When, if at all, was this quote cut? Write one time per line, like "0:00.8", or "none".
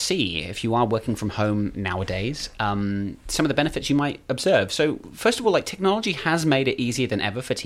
none